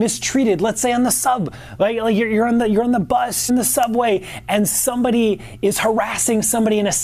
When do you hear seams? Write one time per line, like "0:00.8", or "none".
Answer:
0:03.5